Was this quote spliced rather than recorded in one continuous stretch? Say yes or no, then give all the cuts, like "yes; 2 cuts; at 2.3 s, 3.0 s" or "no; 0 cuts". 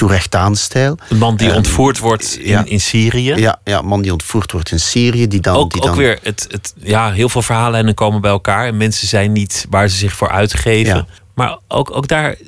yes; 1 cut; at 11.2 s